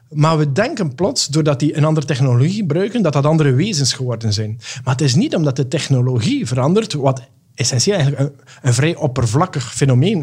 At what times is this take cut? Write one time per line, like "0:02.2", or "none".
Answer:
none